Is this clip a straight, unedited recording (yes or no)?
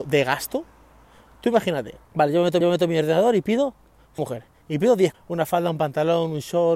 no